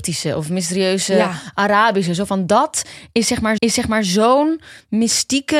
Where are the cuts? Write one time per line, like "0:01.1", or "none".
0:03.6